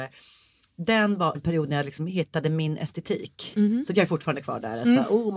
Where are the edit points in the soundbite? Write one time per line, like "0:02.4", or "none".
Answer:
0:01.3